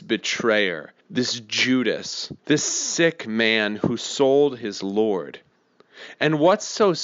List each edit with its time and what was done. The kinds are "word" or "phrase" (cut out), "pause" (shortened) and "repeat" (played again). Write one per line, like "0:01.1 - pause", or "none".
0:01.0 - pause
0:02.4 - pause